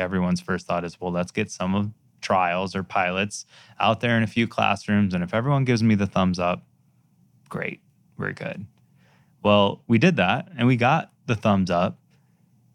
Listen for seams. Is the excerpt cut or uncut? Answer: uncut